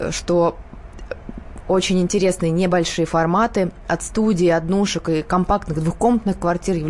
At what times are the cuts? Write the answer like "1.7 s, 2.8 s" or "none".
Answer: none